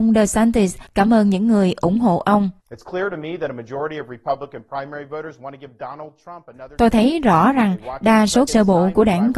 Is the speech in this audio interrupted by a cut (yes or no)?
yes